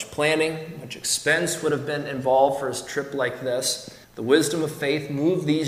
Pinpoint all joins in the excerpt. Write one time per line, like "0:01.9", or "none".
0:04.0

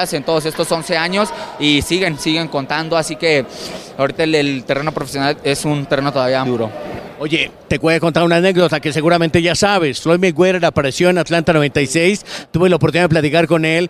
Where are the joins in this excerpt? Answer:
0:06.5

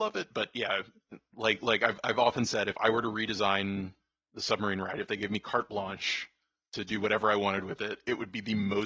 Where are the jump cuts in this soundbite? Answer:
none

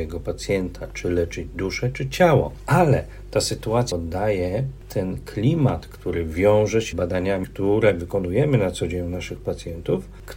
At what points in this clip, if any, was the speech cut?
0:03.9
0:06.9
0:07.4

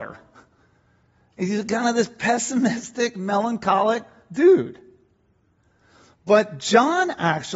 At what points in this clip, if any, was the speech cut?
none

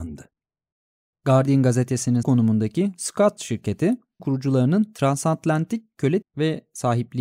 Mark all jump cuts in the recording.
0:02.2
0:03.4
0:04.2
0:06.2

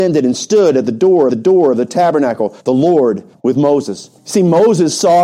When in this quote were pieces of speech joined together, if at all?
0:01.3
0:02.6
0:03.3
0:04.2

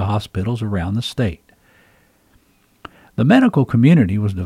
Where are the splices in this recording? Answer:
none

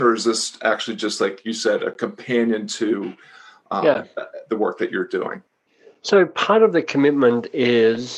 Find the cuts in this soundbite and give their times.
none

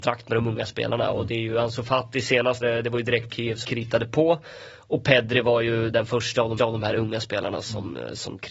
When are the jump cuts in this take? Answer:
0:02.6
0:03.3
0:03.6
0:05.9
0:06.6

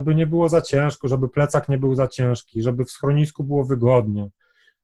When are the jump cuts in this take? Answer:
none

